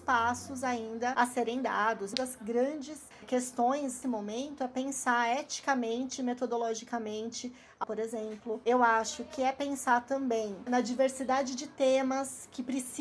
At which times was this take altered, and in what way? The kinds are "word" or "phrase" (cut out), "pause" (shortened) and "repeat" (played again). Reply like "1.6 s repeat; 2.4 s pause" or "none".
2.1 s phrase; 4.0 s word; 7.8 s phrase; 10.7 s word